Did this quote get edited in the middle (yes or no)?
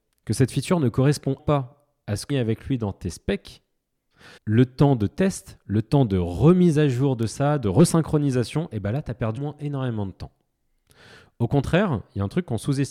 yes